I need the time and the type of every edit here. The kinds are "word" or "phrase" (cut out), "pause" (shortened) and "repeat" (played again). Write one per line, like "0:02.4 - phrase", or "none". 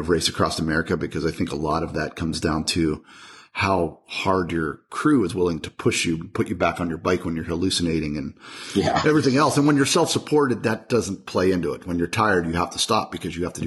none